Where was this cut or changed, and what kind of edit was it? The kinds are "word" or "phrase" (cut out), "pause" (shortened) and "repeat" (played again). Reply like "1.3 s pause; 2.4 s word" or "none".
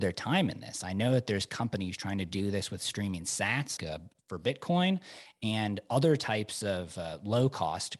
3.8 s word